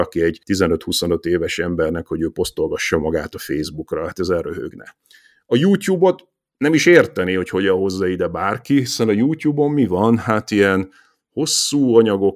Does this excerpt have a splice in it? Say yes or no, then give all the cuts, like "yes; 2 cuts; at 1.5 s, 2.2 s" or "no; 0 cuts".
no; 0 cuts